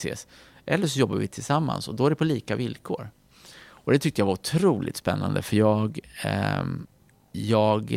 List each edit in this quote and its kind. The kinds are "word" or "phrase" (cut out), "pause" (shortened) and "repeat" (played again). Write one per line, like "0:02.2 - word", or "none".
none

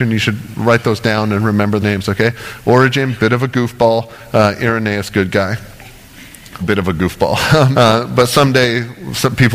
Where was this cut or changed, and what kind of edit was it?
0:01.8 - word
0:06.6 - word
0:07.7 - word

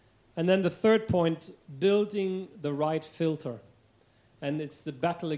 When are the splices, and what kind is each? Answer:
none

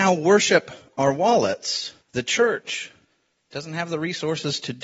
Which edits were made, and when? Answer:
0:02.0 - pause
0:03.0 - pause

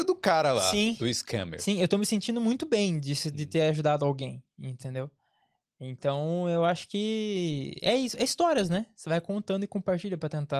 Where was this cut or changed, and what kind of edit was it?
none

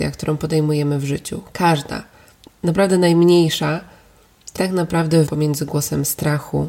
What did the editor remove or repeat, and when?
0:02.5 - word
0:04.6 - word
0:05.3 - word

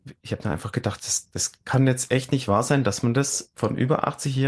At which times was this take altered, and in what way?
none

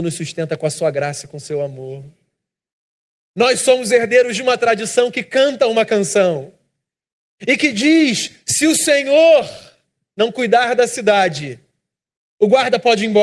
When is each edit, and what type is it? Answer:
none

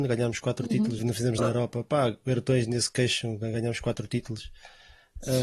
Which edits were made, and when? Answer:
0:01.0 - word
0:01.4 - word

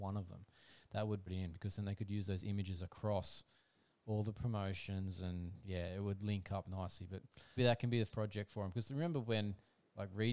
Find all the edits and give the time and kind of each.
0:01.3 - word
0:07.6 - word
0:08.1 - word

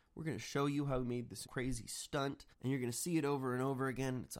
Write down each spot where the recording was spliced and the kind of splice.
0:01.4 - word
0:02.5 - pause

